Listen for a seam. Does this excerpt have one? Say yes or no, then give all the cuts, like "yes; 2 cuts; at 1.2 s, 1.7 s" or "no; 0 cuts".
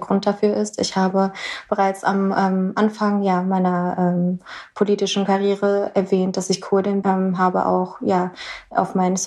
yes; 1 cut; at 7.0 s